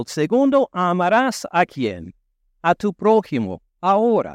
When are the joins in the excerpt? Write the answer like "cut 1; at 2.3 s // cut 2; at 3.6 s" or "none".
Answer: none